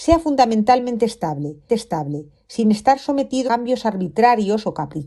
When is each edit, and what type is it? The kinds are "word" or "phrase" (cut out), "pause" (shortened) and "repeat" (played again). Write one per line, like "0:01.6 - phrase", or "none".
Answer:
0:01.7 - repeat
0:03.5 - word

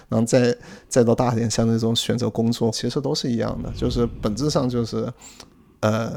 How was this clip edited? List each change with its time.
0:02.7 - phrase

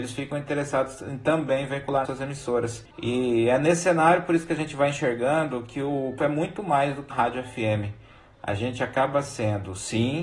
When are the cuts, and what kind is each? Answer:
0:02.0 - word
0:06.2 - word
0:07.1 - word

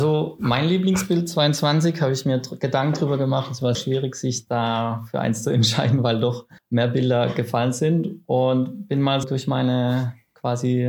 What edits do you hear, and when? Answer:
0:03.7 - word
0:06.6 - pause
0:09.2 - word

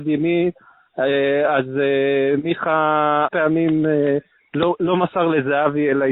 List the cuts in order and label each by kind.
0:03.3 - word

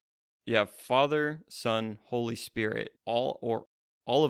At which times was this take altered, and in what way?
0:03.0 - pause

